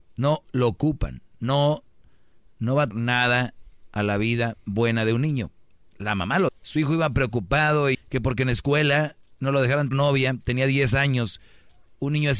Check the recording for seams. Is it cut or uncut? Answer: cut